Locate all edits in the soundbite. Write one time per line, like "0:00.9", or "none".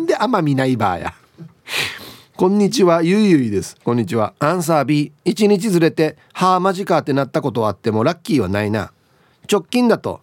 0:01.6
0:04.4
0:05.2